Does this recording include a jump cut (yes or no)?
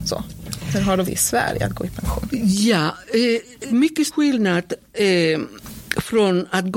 yes